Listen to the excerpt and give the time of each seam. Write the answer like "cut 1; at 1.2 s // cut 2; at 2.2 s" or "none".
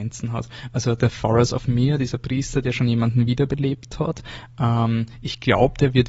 none